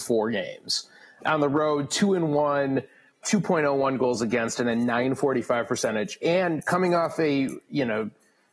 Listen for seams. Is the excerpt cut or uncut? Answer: cut